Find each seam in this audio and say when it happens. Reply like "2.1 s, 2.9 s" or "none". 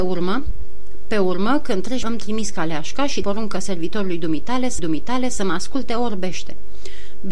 2.0 s, 3.2 s, 4.8 s